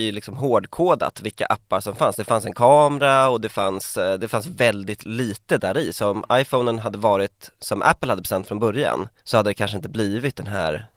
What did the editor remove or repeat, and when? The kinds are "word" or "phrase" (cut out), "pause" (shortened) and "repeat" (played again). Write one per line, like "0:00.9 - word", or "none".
0:07.5 - pause
0:09.2 - pause

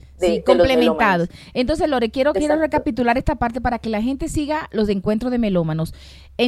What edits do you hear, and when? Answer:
none

